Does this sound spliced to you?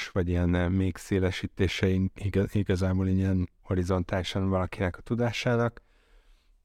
yes; 1 cut; at 3.6 s

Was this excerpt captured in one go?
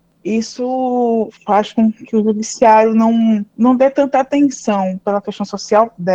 no; 2 cuts; at 1.4 s, 3.5 s

